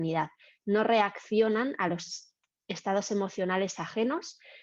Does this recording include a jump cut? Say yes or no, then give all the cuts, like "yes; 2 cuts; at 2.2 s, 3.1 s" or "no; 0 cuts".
no; 0 cuts